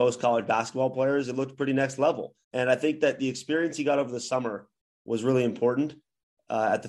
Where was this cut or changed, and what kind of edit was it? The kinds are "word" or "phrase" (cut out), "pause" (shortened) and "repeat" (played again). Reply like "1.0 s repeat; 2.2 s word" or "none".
2.4 s pause